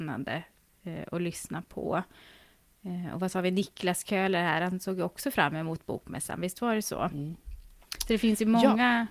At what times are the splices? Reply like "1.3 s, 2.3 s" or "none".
none